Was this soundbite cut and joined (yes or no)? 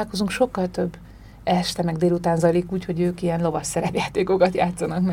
no